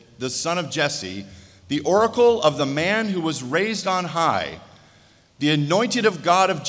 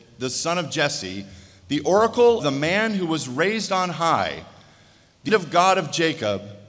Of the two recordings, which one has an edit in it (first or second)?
second